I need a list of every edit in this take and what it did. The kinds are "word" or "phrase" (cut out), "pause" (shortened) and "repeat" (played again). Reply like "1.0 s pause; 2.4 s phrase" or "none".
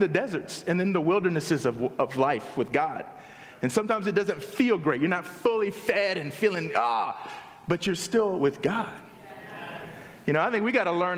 none